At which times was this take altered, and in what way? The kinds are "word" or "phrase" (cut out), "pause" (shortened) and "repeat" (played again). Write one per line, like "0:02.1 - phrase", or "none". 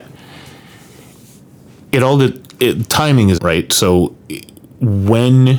0:03.4 - word